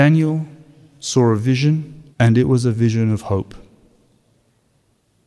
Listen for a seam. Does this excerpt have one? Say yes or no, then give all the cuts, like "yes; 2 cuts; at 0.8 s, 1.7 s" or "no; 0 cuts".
yes; 1 cut; at 2.1 s